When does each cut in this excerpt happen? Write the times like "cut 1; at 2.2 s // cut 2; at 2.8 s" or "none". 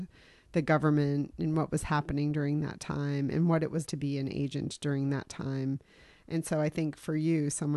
cut 1; at 3.9 s